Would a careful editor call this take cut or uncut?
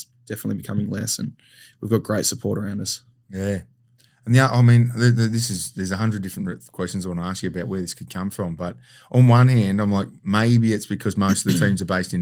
uncut